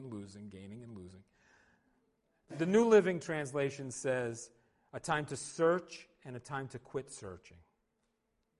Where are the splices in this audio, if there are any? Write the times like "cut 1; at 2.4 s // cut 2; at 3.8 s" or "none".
cut 1; at 2.5 s